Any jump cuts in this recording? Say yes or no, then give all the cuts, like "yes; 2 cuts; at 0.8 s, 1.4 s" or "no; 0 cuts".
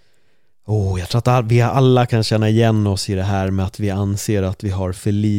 no; 0 cuts